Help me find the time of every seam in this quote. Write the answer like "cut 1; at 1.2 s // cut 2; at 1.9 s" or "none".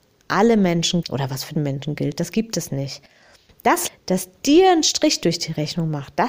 cut 1; at 1.0 s // cut 2; at 1.5 s // cut 3; at 3.9 s